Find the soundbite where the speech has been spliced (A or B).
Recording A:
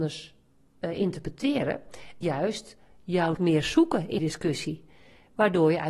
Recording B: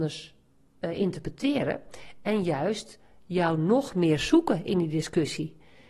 A